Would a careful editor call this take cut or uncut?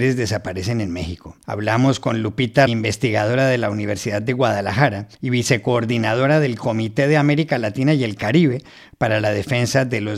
cut